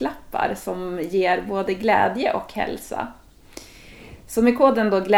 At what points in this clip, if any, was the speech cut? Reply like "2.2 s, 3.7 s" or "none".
none